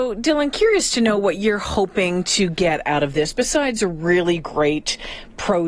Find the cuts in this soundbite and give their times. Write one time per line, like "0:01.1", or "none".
none